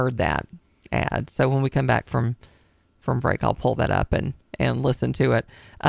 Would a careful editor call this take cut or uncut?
uncut